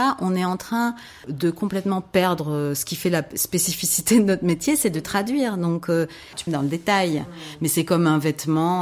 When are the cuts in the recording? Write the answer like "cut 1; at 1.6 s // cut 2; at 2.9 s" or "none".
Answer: cut 1; at 6.5 s